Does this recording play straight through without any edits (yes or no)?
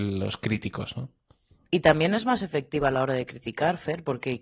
yes